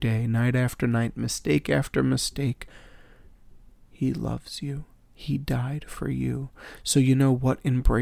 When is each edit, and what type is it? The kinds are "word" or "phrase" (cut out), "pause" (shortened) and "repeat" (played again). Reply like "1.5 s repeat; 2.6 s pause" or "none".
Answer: none